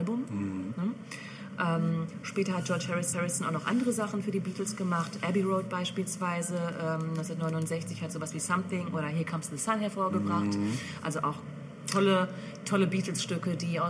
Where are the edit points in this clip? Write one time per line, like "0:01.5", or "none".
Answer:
0:03.1